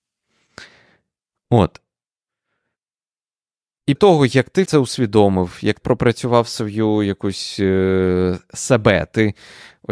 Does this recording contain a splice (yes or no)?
yes